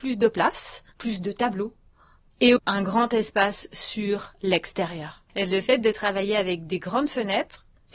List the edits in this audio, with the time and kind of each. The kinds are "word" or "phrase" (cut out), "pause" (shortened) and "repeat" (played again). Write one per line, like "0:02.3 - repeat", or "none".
0:02.6 - word